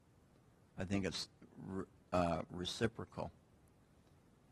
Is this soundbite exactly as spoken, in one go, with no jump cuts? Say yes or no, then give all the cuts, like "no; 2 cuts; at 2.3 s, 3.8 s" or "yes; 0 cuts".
yes; 0 cuts